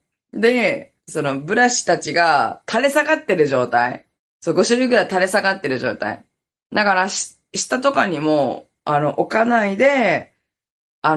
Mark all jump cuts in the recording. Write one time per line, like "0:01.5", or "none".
0:01.0
0:04.2